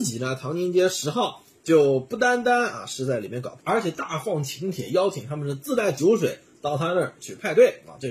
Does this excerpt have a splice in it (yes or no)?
yes